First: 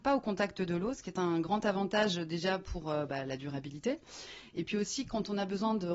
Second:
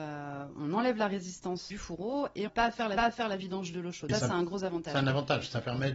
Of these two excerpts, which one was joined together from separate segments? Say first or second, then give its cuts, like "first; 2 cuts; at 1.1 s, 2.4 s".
second; 4 cuts; at 1.7 s, 2.5 s, 3.0 s, 4.1 s